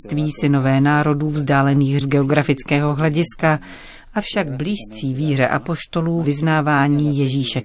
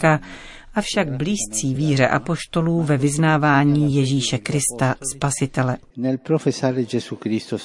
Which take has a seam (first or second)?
first